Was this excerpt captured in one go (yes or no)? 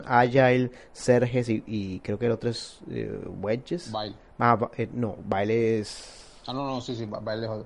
yes